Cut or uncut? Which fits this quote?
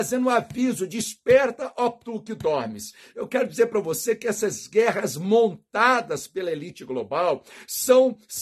uncut